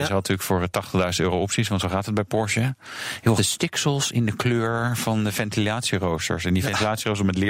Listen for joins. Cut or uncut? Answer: cut